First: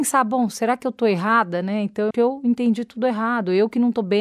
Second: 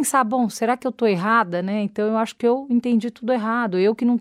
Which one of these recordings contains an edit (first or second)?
first